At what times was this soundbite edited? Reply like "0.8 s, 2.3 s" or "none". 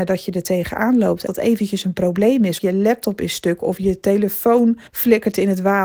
1.3 s, 2.6 s, 4.9 s